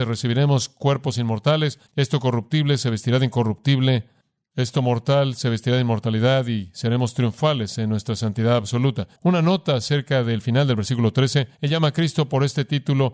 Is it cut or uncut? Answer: cut